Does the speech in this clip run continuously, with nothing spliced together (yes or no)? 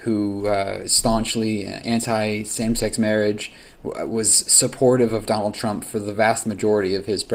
yes